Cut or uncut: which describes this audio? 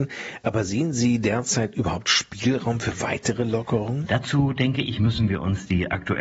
uncut